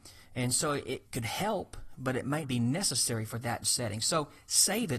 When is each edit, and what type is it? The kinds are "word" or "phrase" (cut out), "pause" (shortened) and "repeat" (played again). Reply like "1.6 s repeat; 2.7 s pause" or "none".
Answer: 1.0 s word; 2.4 s word; 3.6 s word